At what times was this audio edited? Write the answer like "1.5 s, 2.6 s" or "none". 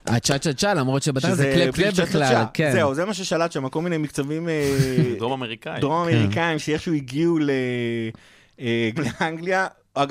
1.7 s, 9.0 s